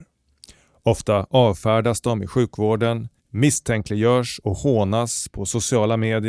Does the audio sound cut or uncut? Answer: cut